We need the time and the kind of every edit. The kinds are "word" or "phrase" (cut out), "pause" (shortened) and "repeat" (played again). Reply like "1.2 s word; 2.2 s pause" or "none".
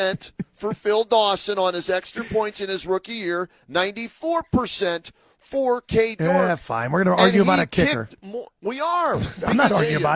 none